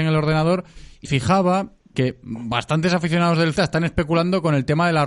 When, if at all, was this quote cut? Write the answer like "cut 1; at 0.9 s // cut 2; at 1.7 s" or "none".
cut 1; at 1.1 s // cut 2; at 1.9 s // cut 3; at 3.6 s